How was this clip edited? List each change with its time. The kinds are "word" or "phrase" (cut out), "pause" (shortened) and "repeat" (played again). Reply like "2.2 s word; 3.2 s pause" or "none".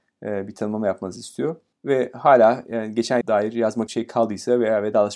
1.7 s pause; 3.2 s word; 3.9 s word

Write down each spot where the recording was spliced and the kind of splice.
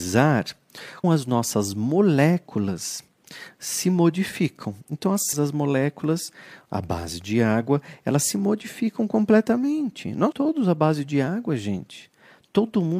1.0 s word; 5.3 s word; 10.3 s word

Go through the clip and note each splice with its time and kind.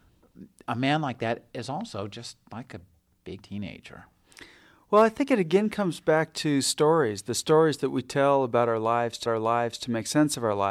3.4 s word; 9.3 s repeat

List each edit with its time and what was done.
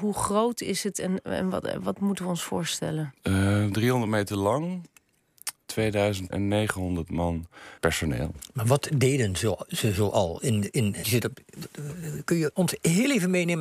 5.6 s word; 6.3 s word; 7.8 s word; 11.0 s word

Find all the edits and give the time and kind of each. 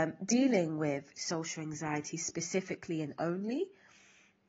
none

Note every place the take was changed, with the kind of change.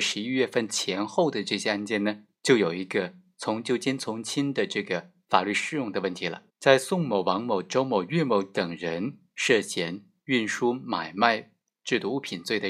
2.4 s pause; 6.5 s pause

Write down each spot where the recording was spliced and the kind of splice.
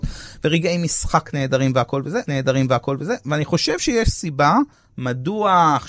2.3 s repeat; 4.7 s pause

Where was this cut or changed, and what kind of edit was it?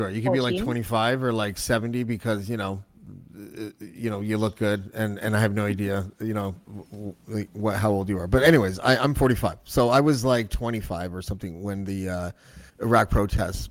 12.7 s pause

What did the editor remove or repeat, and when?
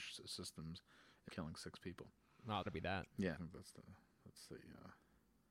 1.3 s word; 2.7 s word; 3.4 s word

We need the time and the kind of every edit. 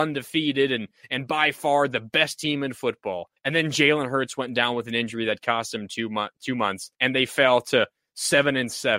3.4 s pause; 6.9 s pause

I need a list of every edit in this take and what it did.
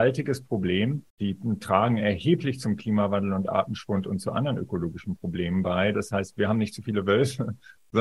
1.1 s pause

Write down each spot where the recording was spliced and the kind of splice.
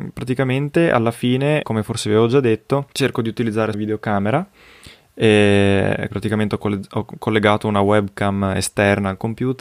1.6 s word; 2.9 s pause; 3.7 s phrase; 6.1 s word

